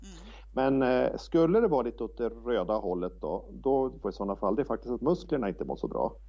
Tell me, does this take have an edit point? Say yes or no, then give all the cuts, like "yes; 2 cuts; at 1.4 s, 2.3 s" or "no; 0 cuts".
yes; 1 cut; at 4.0 s